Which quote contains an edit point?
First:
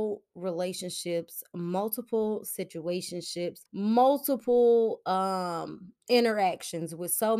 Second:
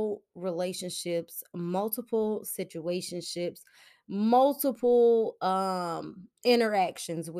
first; 1 cut; at 3.7 s

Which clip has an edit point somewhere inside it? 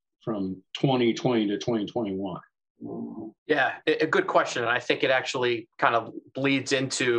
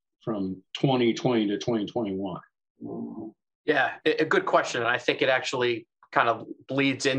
first; 2 cuts; at 3.4 s, 5.7 s

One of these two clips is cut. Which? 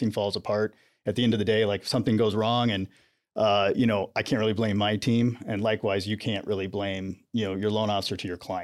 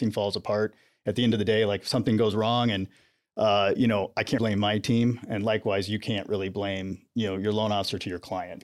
second; 1 cut; at 4.4 s

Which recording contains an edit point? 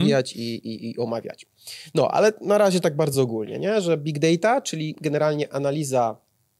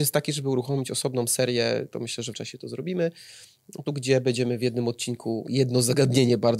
second; 2 cuts; at 2.3 s, 3.9 s

